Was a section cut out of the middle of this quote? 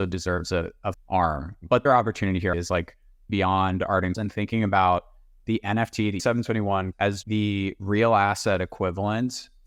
yes; 8 cuts; at 0.9 s, 1.9 s, 2.5 s, 3.3 s, 4.1 s, 6.2 s, 6.9 s, 7.2 s

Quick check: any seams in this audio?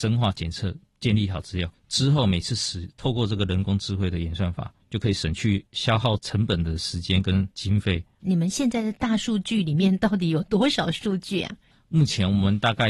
no; 0 cuts

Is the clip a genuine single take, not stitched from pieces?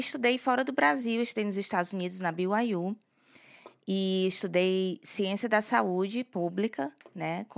yes; 0 cuts

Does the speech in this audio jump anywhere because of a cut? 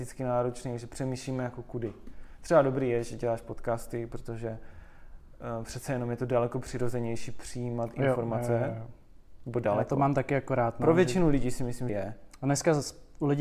yes; 1 cut; at 11.9 s

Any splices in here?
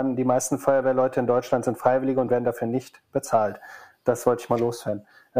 no; 0 cuts

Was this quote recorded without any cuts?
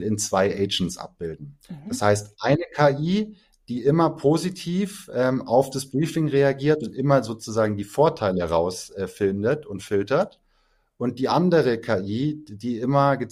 yes; 0 cuts

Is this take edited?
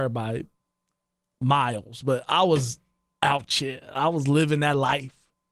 no; 0 cuts

